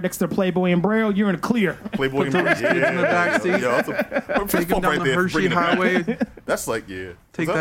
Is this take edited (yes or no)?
no